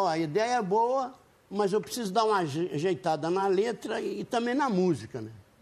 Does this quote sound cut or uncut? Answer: uncut